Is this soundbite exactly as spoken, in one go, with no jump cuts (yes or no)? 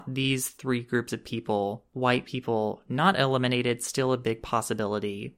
yes